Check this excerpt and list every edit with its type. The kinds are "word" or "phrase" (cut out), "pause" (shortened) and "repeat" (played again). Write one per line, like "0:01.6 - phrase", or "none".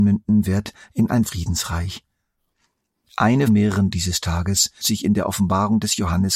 0:01.3 - word
0:03.5 - word
0:03.9 - word
0:04.8 - word